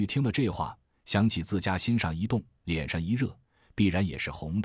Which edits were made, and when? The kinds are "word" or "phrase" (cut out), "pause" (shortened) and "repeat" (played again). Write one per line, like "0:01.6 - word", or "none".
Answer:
none